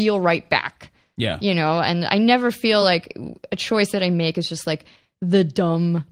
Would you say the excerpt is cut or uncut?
uncut